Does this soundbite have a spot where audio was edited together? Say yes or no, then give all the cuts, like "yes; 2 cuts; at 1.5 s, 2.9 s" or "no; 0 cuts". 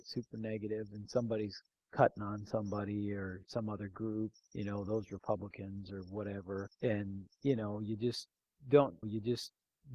yes; 5 cuts; at 1.7 s, 3.4 s, 4.3 s, 6.7 s, 9.0 s